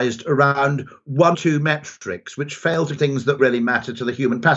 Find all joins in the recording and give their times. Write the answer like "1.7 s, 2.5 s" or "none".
1.3 s, 3.0 s, 3.4 s